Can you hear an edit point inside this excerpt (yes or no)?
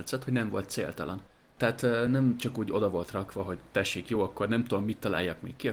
no